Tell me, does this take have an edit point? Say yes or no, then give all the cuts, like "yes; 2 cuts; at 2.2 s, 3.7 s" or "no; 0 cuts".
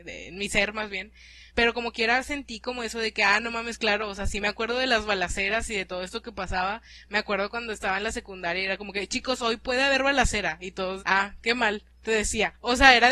yes; 3 cuts; at 1.5 s, 11.0 s, 12.0 s